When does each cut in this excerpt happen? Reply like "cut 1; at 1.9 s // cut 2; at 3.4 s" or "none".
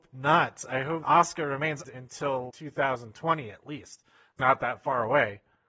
cut 1; at 1.0 s // cut 2; at 1.8 s // cut 3; at 2.5 s // cut 4; at 4.4 s